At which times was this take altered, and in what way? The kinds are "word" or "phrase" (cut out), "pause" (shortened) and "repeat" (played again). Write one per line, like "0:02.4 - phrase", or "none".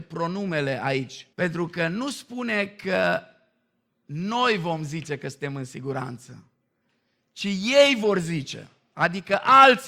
0:01.3 - pause